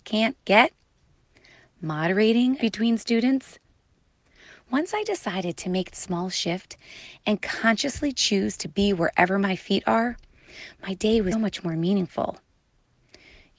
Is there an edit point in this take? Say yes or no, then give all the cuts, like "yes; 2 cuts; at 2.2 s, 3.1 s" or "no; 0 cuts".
yes; 3 cuts; at 2.6 s, 5.9 s, 11.3 s